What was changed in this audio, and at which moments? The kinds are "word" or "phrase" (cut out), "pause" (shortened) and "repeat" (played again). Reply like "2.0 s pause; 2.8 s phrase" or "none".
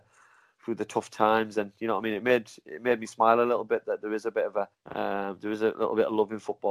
4.7 s pause